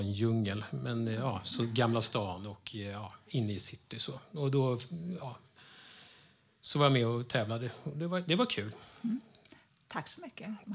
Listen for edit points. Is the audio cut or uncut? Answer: uncut